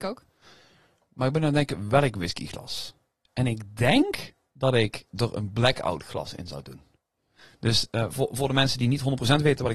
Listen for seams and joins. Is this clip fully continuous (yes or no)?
yes